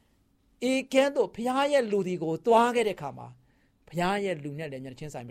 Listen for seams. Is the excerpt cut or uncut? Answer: uncut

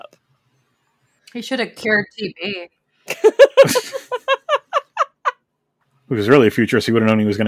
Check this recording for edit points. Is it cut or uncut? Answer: uncut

